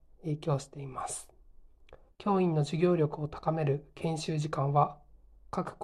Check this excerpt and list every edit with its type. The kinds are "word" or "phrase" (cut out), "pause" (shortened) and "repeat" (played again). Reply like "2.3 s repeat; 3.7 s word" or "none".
2.1 s pause